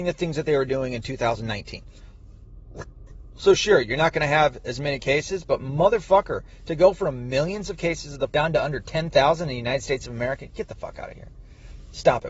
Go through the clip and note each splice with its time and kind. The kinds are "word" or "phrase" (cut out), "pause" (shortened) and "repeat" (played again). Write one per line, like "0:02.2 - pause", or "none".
0:08.3 - word